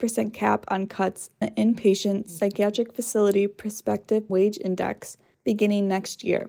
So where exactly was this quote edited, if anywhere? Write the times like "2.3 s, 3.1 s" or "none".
1.4 s, 4.3 s